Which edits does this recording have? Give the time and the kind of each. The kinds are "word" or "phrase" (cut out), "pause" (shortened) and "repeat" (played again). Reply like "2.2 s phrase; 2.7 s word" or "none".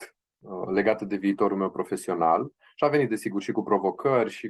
none